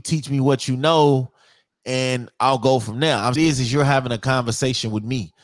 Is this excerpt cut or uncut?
cut